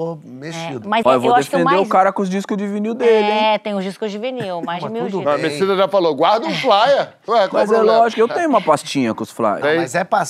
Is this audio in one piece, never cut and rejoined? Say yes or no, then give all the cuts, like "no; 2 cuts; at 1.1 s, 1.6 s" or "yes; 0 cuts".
no; 1 cut; at 1.0 s